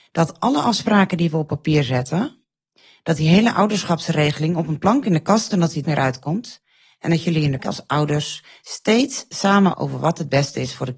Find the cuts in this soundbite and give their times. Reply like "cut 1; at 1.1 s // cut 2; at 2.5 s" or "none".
cut 1; at 5.5 s // cut 2; at 5.8 s // cut 3; at 7.6 s // cut 4; at 9.7 s